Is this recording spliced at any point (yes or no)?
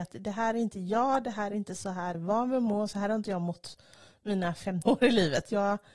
yes